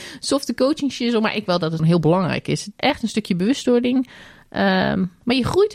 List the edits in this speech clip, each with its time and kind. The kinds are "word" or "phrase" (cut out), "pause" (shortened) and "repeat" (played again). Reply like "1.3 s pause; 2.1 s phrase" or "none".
1.5 s word; 1.8 s word; 2.7 s word